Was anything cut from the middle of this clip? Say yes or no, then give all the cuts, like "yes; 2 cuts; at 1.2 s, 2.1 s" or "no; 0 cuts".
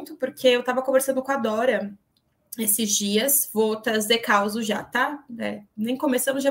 no; 0 cuts